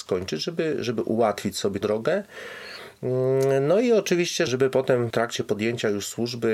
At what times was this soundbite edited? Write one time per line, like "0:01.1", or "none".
0:01.8
0:04.5
0:05.1